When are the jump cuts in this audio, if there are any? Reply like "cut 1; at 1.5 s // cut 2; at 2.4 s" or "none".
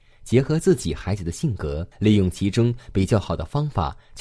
cut 1; at 1.9 s